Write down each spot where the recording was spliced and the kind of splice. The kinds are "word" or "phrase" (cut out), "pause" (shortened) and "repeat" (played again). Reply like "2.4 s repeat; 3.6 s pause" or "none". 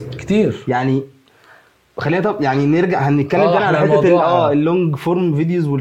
none